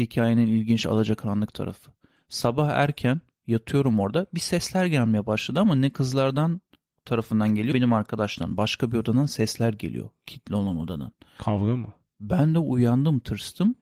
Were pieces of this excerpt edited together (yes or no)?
yes